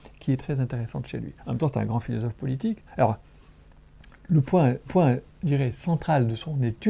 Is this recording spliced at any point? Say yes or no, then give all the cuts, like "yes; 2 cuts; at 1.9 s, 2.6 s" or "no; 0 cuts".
yes; 3 cuts; at 1.4 s, 2.9 s, 4.9 s